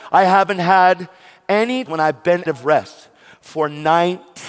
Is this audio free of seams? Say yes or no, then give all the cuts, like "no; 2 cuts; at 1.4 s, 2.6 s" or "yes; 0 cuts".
no; 2 cuts; at 1.9 s, 2.5 s